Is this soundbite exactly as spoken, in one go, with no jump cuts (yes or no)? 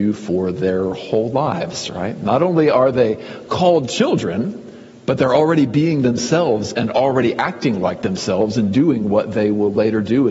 yes